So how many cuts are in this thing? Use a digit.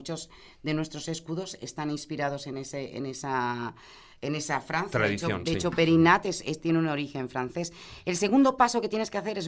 0